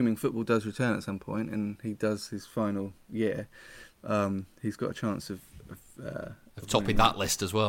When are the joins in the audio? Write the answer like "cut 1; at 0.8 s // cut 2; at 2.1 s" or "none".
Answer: none